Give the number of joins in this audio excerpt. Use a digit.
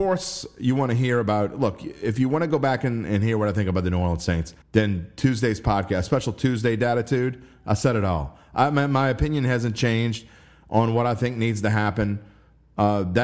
1